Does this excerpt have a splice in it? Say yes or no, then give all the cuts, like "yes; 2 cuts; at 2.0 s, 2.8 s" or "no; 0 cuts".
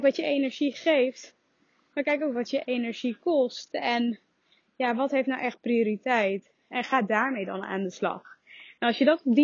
no; 0 cuts